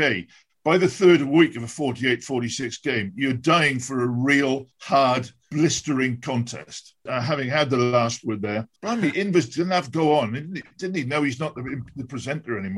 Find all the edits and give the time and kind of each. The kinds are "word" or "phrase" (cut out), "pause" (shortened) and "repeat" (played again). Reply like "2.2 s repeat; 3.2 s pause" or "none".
4.7 s pause; 8.8 s pause